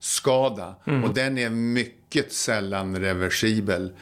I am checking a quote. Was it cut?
no; 0 cuts

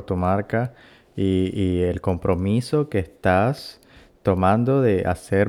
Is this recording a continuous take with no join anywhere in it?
yes; 0 cuts

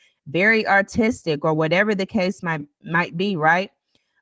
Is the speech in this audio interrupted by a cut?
no; 0 cuts

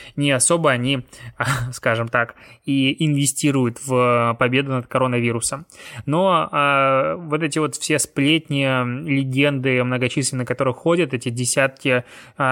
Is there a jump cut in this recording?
no; 0 cuts

